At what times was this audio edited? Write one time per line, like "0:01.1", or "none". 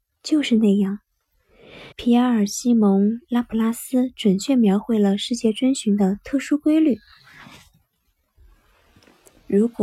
0:01.9